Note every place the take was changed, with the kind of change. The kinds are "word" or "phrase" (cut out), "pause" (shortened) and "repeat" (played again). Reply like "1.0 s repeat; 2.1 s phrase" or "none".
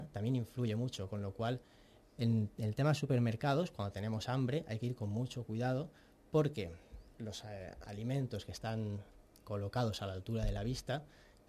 none